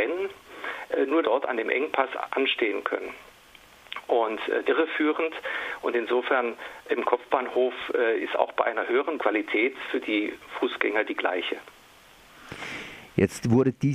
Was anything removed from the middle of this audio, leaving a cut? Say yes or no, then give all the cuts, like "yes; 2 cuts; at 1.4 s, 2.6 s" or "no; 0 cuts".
yes; 3 cuts; at 1.2 s, 4.6 s, 9.2 s